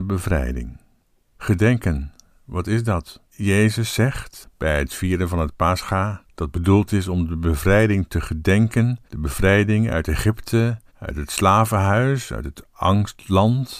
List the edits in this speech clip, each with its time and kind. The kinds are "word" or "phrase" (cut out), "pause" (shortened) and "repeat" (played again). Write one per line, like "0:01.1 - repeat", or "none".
0:01.0 - pause
0:03.3 - pause
0:09.1 - pause
0:10.9 - pause